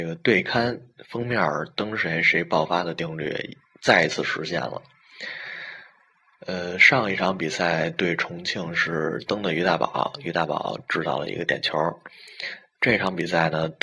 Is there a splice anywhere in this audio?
no; 0 cuts

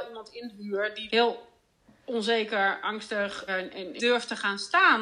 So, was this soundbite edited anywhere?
yes; 3 cuts; at 1.1 s, 3.5 s, 4.0 s

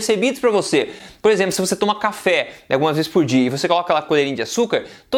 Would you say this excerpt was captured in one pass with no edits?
yes; 0 cuts

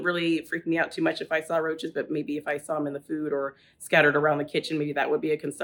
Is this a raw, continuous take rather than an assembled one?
yes; 0 cuts

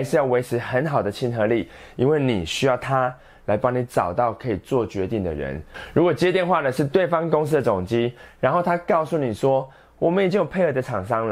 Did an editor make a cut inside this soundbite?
no; 0 cuts

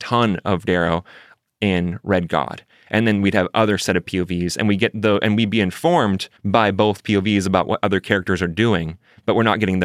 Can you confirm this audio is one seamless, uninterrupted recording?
no; 1 cut; at 6.4 s

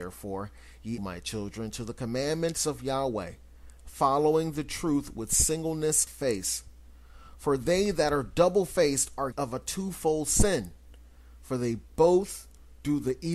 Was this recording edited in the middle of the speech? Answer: yes; 3 cuts; at 1.0 s, 6.1 s, 9.3 s

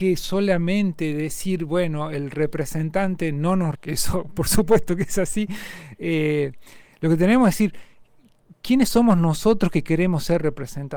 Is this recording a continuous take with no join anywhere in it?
no; 1 cut; at 3.8 s

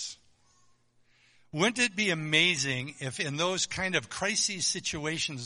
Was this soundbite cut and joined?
no; 0 cuts

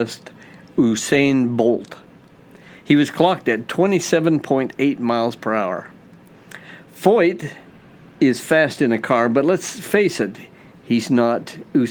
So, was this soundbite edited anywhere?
no; 0 cuts

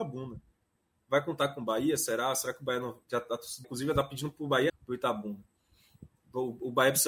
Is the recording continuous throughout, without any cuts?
no; 3 cuts; at 3.0 s, 3.6 s, 4.7 s

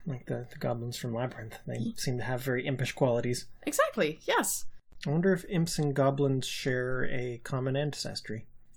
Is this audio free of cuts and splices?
yes; 0 cuts

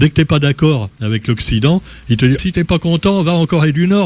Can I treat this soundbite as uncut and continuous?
no; 1 cut; at 2.4 s

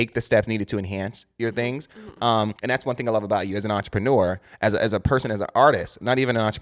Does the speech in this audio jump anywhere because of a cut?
yes; 1 cut; at 2.6 s

